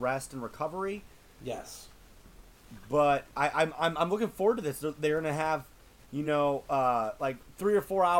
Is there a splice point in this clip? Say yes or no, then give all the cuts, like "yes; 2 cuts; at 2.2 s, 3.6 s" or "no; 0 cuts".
no; 0 cuts